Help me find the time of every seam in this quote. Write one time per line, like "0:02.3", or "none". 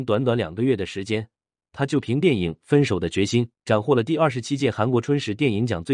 0:03.5